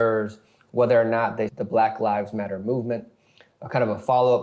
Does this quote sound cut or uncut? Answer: cut